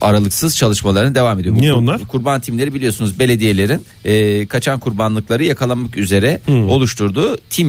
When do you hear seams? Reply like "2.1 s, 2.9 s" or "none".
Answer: 3.9 s